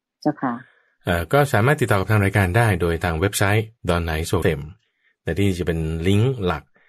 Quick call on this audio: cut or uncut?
cut